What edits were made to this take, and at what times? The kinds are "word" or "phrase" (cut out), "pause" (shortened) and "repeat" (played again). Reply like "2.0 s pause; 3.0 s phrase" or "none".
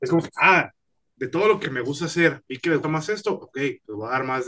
1.6 s word; 2.8 s word